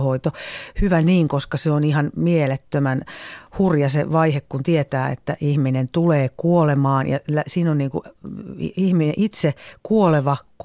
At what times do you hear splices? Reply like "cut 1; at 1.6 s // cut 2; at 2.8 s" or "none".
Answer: none